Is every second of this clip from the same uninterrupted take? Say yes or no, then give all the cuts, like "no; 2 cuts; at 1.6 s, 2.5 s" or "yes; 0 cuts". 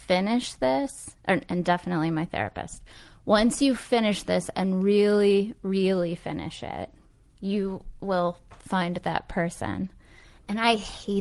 yes; 0 cuts